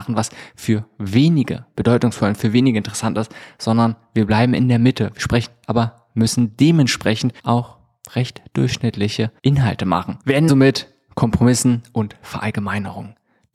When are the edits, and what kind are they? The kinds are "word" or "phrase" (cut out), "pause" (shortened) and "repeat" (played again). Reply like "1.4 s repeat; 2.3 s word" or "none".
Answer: 5.6 s phrase; 7.4 s pause; 9.4 s pause; 10.5 s word